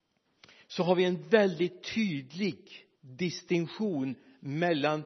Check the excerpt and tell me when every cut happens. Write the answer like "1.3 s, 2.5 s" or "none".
3.0 s